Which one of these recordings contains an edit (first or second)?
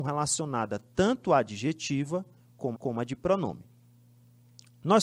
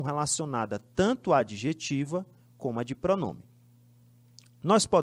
first